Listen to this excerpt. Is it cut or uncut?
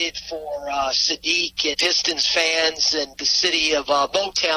cut